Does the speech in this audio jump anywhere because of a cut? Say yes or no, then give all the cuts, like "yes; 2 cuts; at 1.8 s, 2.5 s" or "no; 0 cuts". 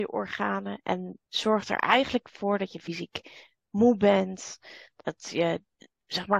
yes; 1 cut; at 1.3 s